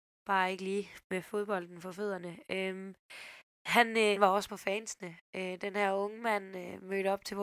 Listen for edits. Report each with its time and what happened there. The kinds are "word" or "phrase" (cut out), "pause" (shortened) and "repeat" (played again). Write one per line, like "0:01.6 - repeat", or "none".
0:04.2 - word
0:04.5 - word